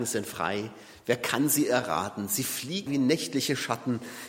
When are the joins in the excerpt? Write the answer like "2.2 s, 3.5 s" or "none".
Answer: 2.9 s